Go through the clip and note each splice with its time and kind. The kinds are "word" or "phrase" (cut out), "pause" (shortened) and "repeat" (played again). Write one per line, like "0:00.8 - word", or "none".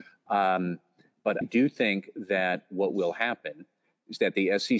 0:01.4 - word